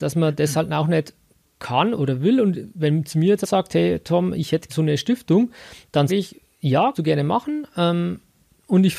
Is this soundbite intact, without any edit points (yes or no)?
no